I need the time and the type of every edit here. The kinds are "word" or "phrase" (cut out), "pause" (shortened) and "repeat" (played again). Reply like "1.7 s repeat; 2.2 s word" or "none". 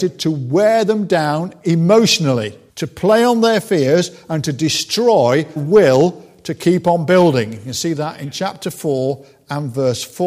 2.7 s pause; 5.6 s word